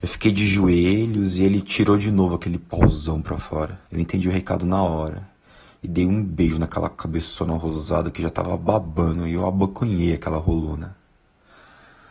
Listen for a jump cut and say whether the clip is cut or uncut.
cut